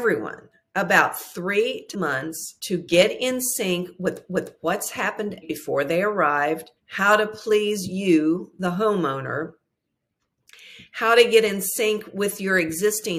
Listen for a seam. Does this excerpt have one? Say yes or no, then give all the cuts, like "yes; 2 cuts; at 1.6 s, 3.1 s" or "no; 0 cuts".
yes; 5 cuts; at 1.9 s, 2.6 s, 4.3 s, 5.4 s, 6.8 s